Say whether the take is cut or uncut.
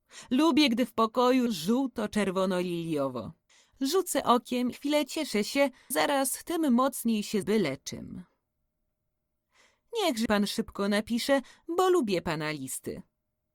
cut